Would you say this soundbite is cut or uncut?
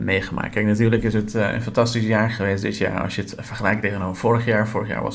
uncut